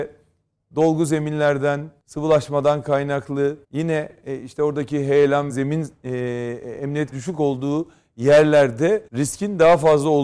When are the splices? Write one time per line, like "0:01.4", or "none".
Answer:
0:02.0
0:03.6
0:05.5
0:07.1
0:09.1